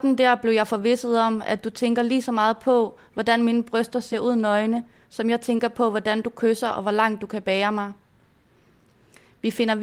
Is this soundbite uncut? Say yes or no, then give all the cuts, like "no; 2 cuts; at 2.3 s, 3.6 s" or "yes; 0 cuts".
yes; 0 cuts